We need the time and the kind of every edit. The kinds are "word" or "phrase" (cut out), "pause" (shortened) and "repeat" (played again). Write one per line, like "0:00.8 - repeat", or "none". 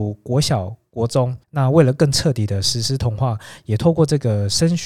0:01.4 - pause